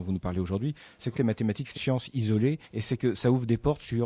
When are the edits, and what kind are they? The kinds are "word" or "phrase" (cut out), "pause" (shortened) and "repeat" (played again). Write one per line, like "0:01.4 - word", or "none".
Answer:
0:01.1 - word
0:01.7 - phrase
0:02.6 - pause

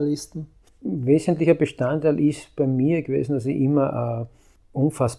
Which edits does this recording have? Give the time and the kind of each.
none

